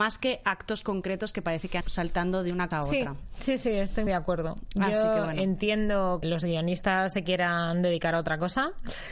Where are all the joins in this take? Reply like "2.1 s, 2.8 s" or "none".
1.8 s, 2.7 s, 4.1 s, 6.2 s